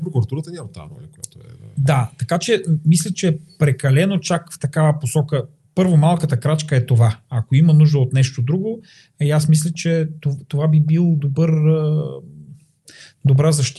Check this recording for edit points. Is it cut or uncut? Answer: uncut